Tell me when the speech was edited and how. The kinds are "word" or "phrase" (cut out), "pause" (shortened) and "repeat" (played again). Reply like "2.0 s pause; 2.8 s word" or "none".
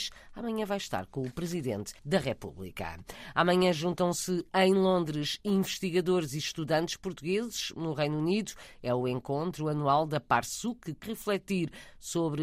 2.0 s pause; 11.0 s word

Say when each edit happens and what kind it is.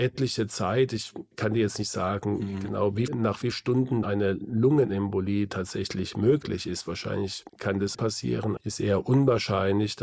1.3 s pause; 3.1 s word; 3.5 s word; 4.0 s word; 7.5 s pause; 7.9 s phrase; 8.6 s word

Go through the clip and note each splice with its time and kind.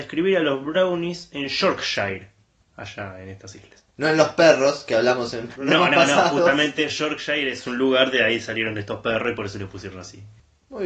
none

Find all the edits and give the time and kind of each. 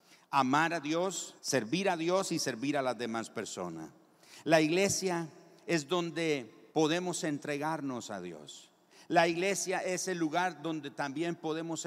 1.4 s pause; 6.7 s pause

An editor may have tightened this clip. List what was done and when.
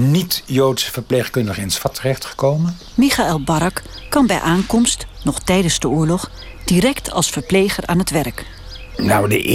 none

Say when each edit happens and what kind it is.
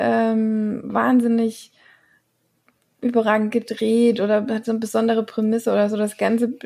none

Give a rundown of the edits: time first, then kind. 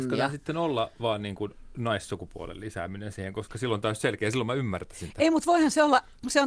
none

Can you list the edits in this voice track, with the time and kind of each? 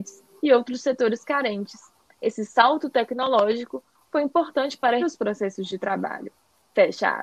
5.0 s word

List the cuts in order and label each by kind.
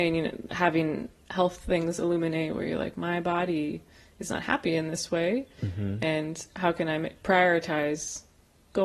none

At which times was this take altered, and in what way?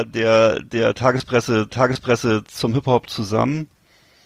1.7 s repeat

